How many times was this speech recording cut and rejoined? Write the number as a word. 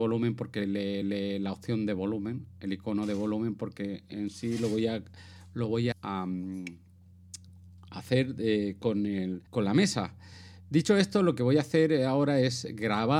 three